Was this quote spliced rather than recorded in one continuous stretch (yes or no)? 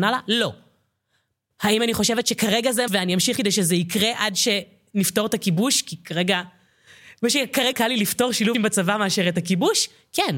yes